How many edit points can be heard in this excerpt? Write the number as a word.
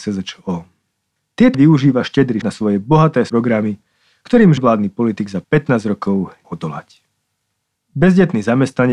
six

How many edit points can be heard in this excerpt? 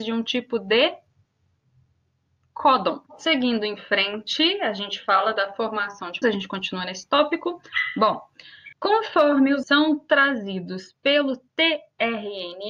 four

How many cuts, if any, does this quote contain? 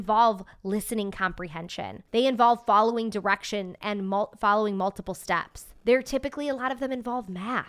two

